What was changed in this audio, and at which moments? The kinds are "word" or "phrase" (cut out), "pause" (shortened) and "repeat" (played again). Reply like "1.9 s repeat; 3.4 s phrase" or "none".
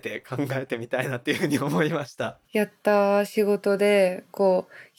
2.4 s pause